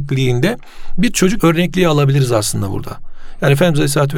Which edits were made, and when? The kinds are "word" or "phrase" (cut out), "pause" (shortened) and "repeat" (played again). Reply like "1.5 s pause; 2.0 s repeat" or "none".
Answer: 1.4 s phrase